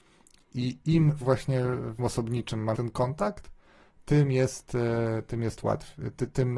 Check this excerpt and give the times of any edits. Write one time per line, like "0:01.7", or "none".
0:01.2
0:02.0
0:02.7